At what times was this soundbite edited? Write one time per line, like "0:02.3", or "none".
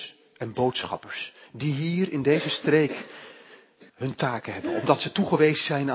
0:03.9